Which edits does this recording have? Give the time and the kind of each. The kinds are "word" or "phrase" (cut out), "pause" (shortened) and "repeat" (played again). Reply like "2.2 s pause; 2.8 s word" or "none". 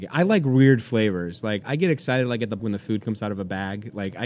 1.6 s word; 2.6 s word

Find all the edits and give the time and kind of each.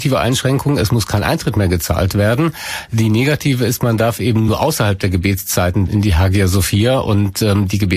5.9 s word

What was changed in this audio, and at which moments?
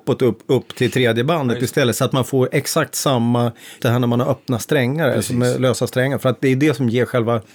3.8 s word

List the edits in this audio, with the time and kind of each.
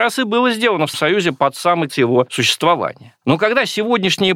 0.9 s word; 1.9 s word

